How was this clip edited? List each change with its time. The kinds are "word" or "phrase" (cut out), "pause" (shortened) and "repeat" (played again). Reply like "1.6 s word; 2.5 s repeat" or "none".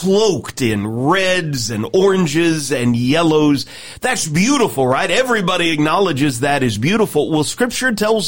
none